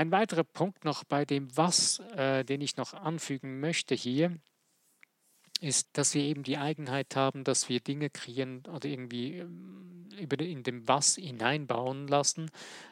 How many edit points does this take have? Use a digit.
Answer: 1